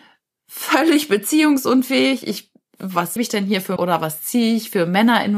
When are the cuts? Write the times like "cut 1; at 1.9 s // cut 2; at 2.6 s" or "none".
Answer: cut 1; at 3.2 s // cut 2; at 3.8 s